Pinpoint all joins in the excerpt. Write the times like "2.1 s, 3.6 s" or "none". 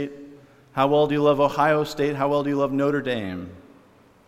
none